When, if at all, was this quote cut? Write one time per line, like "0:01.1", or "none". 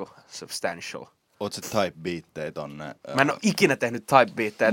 0:01.6

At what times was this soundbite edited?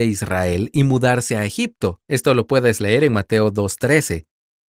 none

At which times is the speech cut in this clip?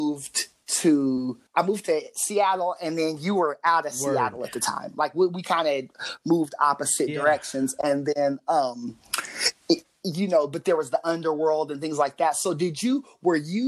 0:01.5

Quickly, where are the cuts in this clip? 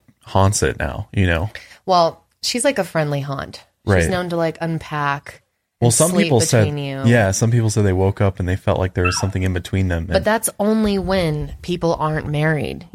none

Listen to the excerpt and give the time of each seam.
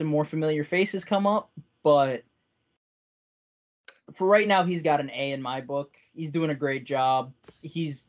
none

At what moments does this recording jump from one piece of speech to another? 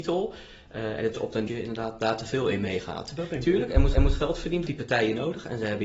0:01.1
0:01.5
0:03.9
0:04.7

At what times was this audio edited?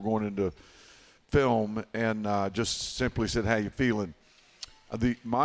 none

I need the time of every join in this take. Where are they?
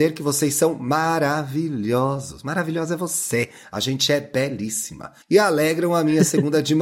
0:05.2

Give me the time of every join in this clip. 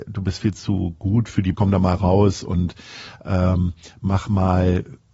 0:01.5

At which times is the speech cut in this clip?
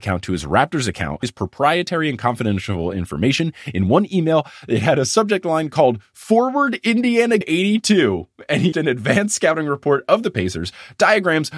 0:01.2
0:07.4
0:08.7

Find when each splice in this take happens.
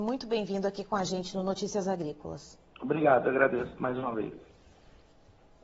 0:02.7

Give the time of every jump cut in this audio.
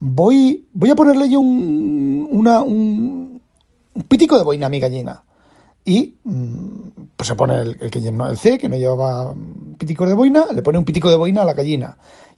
none

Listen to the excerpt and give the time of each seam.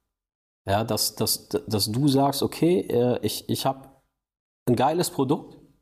none

